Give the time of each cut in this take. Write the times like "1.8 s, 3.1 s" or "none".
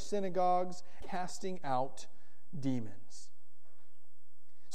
1.0 s

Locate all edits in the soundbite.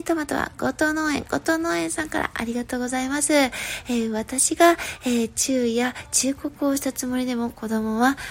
none

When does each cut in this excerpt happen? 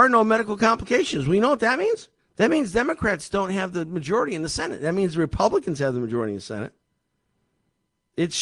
2.2 s

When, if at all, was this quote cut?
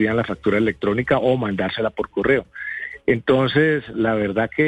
none

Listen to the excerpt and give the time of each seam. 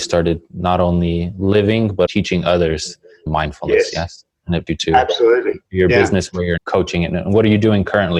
2.1 s, 3.3 s, 4.7 s, 5.7 s, 6.6 s

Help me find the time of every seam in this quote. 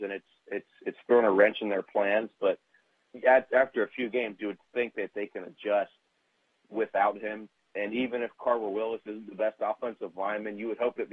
none

